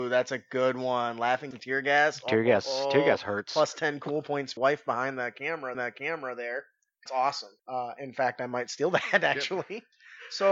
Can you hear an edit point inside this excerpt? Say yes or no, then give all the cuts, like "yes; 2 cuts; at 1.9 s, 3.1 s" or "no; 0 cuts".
yes; 5 cuts; at 1.5 s, 4.6 s, 5.7 s, 7.1 s, 7.6 s